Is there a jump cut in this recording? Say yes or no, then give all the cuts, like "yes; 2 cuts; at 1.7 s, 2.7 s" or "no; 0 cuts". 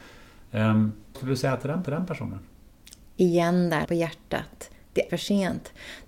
yes; 4 cuts; at 1.1 s, 1.8 s, 3.8 s, 5.1 s